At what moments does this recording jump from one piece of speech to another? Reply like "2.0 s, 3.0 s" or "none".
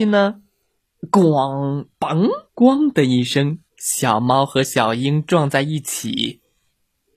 2.5 s, 3.7 s